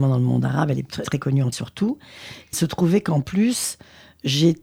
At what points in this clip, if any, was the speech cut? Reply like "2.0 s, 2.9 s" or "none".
1.0 s, 1.5 s, 2.5 s

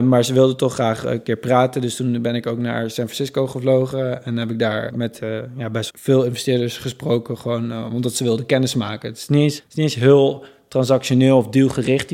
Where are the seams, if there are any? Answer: 4.9 s, 5.9 s, 9.6 s

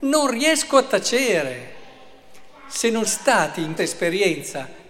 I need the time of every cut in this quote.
3.0 s, 3.8 s

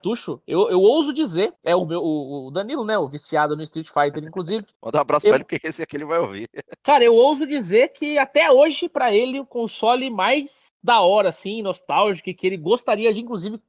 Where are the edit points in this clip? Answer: 1.6 s

